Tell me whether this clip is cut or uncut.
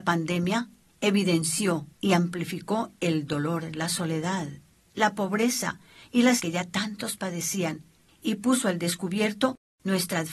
cut